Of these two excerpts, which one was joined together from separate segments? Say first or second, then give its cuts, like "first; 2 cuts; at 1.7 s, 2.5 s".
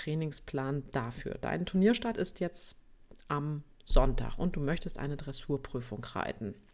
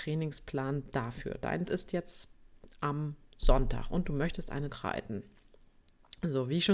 second; 2 cuts; at 1.7 s, 4.7 s